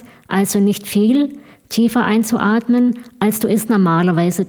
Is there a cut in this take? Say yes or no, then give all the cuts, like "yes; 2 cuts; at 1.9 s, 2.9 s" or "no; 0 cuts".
no; 0 cuts